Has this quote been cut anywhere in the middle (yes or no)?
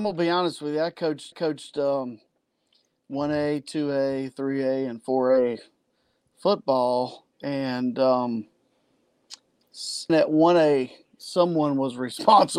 yes